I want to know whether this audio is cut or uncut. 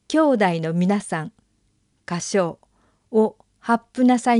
uncut